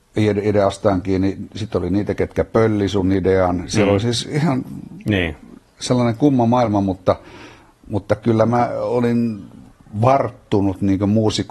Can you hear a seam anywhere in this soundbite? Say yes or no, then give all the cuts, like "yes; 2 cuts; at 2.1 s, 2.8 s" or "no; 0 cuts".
no; 0 cuts